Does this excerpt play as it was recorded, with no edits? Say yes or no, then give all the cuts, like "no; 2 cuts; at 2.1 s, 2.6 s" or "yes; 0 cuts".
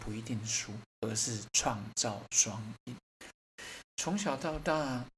no; 1 cut; at 0.9 s